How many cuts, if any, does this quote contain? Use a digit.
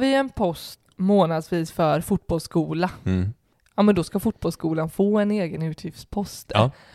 0